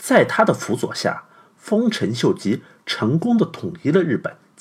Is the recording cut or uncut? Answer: uncut